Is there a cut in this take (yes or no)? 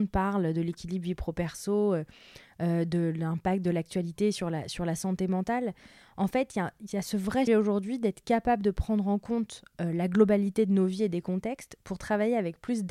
yes